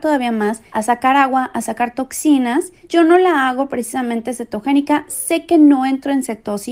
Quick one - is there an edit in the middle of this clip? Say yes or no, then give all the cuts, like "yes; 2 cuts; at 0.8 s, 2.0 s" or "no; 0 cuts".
no; 0 cuts